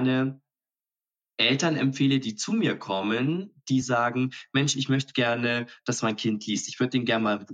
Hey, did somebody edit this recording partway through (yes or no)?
no